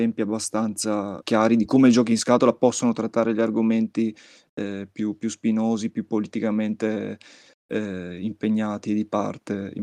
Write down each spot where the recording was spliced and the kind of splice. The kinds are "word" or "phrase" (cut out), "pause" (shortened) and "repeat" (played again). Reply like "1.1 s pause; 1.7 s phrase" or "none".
none